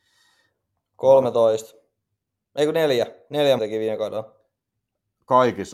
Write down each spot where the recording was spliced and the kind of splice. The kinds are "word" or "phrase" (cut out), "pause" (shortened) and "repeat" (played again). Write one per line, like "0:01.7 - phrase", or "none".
0:03.6 - word